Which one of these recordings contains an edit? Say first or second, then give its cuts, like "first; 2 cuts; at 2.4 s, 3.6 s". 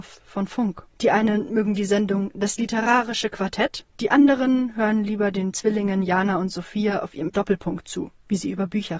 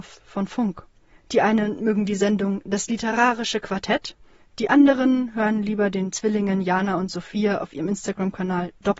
first; 3 cuts; at 0.9 s, 3.9 s, 7.3 s